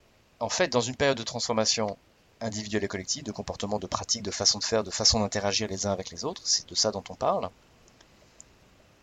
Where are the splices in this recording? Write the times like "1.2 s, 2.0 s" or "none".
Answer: none